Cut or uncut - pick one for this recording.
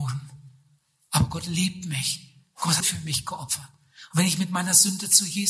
cut